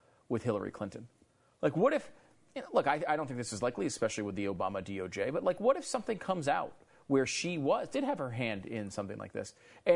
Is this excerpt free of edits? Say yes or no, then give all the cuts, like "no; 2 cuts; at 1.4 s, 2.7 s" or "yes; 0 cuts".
yes; 0 cuts